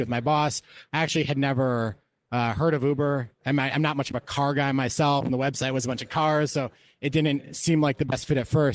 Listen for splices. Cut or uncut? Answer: uncut